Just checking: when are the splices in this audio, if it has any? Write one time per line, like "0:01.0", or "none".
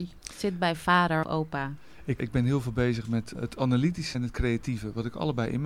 0:01.2
0:02.2
0:03.3
0:04.1